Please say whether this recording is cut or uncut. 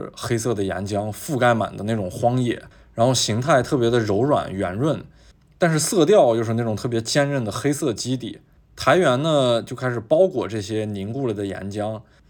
uncut